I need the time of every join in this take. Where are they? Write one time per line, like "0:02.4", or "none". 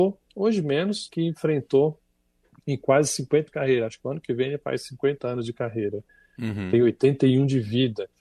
0:01.1
0:03.5